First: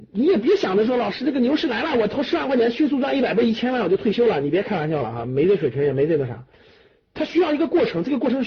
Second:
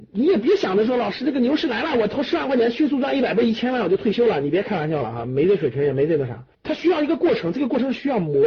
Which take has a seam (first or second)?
second